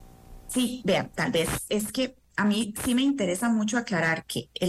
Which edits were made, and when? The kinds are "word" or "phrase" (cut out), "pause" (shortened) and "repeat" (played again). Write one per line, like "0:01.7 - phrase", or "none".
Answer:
none